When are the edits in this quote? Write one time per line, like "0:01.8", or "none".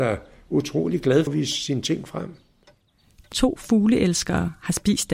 0:01.3
0:03.3